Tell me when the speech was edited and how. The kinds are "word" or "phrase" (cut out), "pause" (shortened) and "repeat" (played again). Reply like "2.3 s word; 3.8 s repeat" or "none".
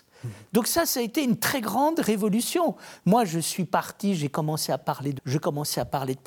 5.2 s word

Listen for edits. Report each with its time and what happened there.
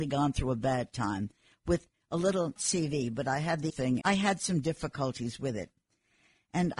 2.6 s word; 3.7 s word; 4.0 s word

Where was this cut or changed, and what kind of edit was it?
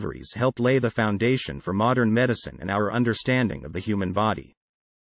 none

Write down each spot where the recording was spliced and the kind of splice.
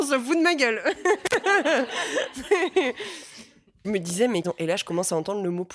3.8 s word; 4.4 s phrase

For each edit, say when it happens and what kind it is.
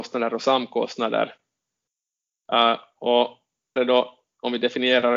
3.8 s word

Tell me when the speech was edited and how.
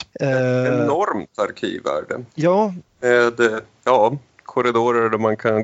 2.3 s pause

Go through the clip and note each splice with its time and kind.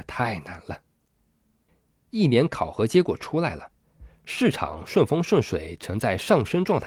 2.5 s word

